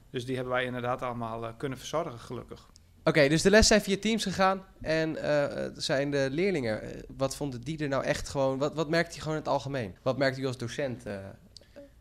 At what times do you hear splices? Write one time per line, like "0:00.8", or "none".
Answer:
none